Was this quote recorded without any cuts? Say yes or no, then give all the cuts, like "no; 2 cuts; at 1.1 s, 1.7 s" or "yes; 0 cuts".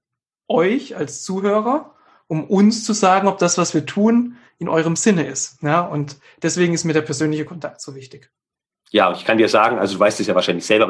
yes; 0 cuts